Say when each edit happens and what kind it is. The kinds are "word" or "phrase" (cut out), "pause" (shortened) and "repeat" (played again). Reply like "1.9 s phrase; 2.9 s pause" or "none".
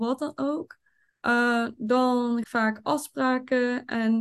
2.4 s phrase